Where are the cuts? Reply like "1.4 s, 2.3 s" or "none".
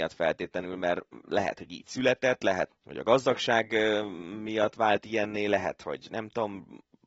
2.7 s